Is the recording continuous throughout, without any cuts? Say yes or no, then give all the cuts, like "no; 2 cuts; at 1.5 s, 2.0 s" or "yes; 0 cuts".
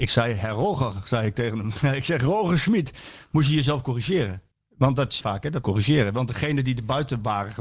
no; 3 cuts; at 4.5 s, 5.2 s, 5.6 s